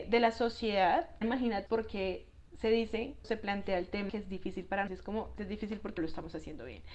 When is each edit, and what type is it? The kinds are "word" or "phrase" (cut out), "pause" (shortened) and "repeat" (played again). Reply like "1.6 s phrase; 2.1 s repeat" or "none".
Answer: 1.2 s word; 1.7 s word; 3.2 s word; 4.1 s word; 4.9 s word; 5.4 s word; 6.0 s word